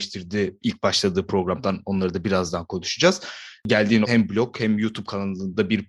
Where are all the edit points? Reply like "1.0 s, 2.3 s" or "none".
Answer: 4.0 s